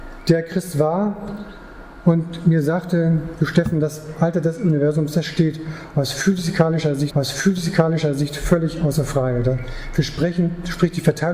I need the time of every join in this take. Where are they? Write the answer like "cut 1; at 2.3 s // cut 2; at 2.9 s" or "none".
cut 1; at 7.1 s